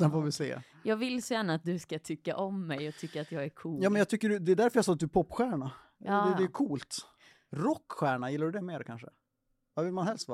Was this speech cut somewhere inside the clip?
no; 0 cuts

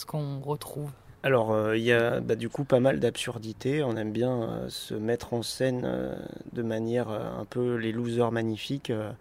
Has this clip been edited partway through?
no; 0 cuts

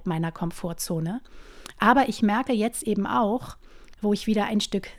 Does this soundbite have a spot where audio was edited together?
no; 0 cuts

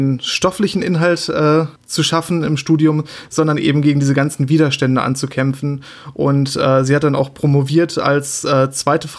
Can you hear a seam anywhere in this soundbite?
yes; 1 cut; at 1.8 s

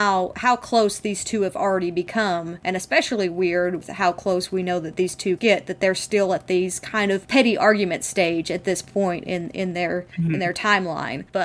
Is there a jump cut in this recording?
yes; 2 cuts; at 3.8 s, 5.4 s

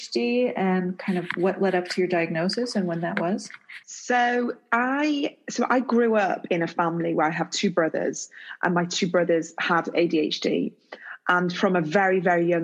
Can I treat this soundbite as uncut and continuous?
yes; 0 cuts

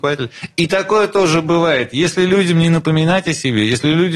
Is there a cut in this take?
no; 0 cuts

